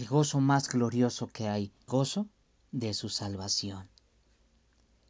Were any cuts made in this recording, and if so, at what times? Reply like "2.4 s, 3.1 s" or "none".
1.9 s